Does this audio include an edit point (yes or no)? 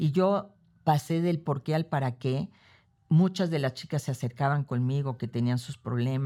no